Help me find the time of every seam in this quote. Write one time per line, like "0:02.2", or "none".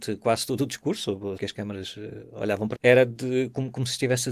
0:01.4
0:02.7